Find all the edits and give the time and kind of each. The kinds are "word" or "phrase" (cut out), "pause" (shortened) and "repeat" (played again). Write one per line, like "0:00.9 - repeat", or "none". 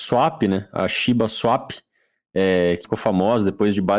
0:02.8 - word